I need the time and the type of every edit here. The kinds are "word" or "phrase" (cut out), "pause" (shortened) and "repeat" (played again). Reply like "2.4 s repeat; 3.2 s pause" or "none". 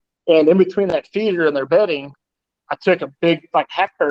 none

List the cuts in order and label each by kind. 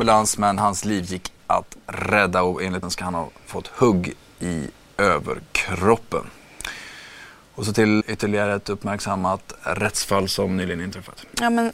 1.4 s word; 2.8 s word; 8.0 s word

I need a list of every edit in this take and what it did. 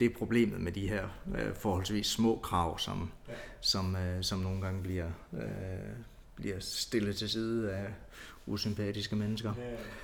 none

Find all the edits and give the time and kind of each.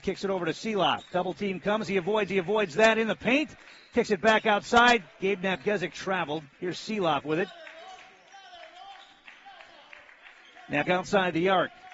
2.3 s repeat; 5.9 s word; 6.5 s pause; 10.8 s word

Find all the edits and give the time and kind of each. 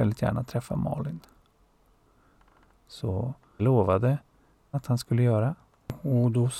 3.6 s word; 4.7 s word

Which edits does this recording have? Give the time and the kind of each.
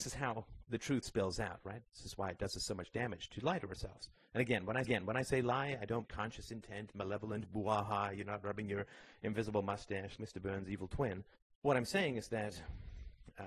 1.0 s word; 4.8 s repeat; 6.0 s phrase; 10.2 s word; 11.4 s pause

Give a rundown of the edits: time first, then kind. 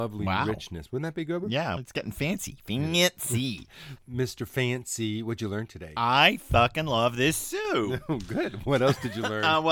1.8 s word; 4.0 s word

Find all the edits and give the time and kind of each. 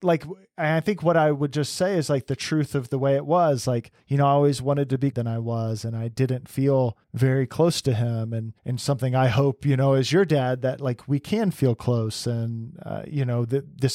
4.0 s pause; 5.1 s phrase; 7.0 s pause; 8.6 s pause

